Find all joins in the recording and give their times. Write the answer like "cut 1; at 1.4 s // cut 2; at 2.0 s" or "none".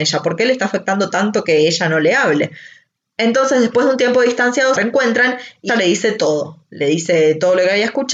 cut 1; at 4.7 s // cut 2; at 5.7 s